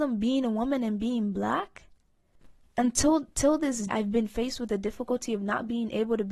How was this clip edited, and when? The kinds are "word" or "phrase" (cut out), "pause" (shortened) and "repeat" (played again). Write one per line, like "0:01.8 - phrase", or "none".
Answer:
0:02.6 - pause
0:03.9 - word